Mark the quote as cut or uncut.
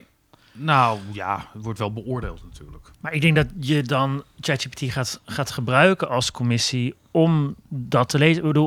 cut